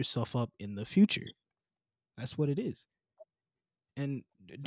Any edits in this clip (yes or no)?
no